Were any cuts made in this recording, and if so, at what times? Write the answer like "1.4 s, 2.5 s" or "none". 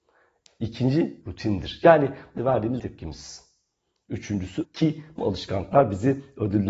1.2 s, 2.4 s, 2.8 s, 4.6 s, 5.2 s

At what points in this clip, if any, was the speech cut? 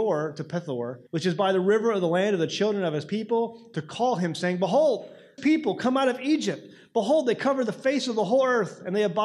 1.1 s, 5.4 s

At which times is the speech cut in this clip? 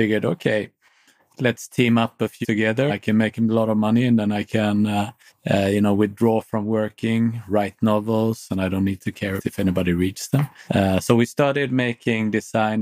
2.4 s, 2.9 s, 5.3 s, 9.4 s, 10.7 s

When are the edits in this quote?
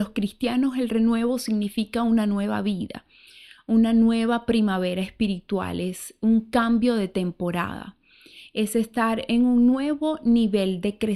none

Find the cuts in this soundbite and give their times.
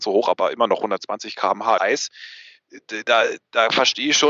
1.8 s

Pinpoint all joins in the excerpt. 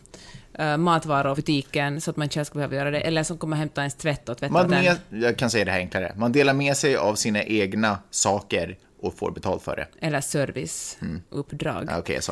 1.4 s, 4.7 s

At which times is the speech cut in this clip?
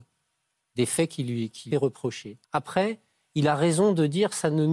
1.7 s, 2.4 s

